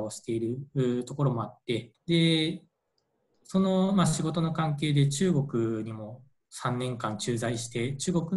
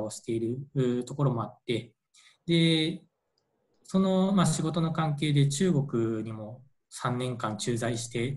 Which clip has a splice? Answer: first; 1 cut; at 1.9 s

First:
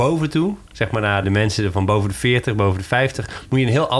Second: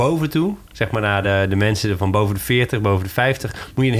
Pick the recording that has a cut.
first; 1 cut; at 1.2 s

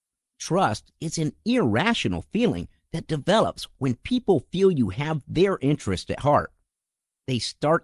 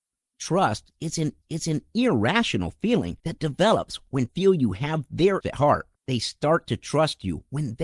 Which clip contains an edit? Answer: second; 5 cuts; at 1.4 s, 3.2 s, 4.3 s, 5.4 s, 6.0 s

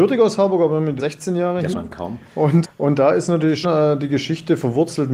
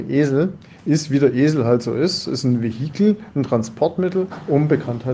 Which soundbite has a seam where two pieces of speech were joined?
first; 4 cuts; at 1.0 s, 1.7 s, 2.6 s, 3.6 s

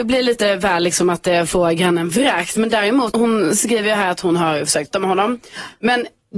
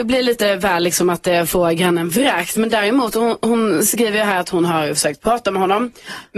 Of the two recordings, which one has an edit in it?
first; 2 cuts; at 3.1 s, 4.9 s

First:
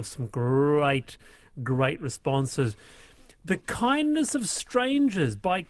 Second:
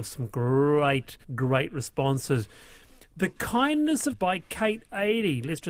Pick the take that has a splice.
second; 2 cuts; at 1.2 s, 4.1 s

